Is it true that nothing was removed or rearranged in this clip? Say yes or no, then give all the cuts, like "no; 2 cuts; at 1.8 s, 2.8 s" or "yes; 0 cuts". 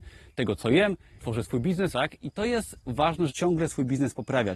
no; 4 cuts; at 1.2 s, 1.9 s, 2.8 s, 3.3 s